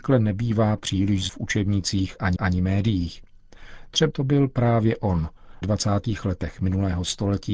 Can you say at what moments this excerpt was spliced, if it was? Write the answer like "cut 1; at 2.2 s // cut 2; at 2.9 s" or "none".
cut 1; at 1.3 s // cut 2; at 2.4 s // cut 3; at 4.1 s // cut 4; at 5.6 s